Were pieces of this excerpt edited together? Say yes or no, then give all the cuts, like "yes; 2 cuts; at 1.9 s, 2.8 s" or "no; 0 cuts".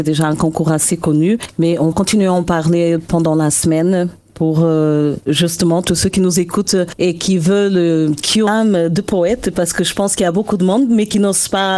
yes; 2 cuts; at 1.9 s, 8.5 s